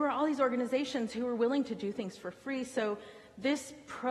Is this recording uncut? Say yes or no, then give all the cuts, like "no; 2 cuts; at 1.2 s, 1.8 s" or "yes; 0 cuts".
yes; 0 cuts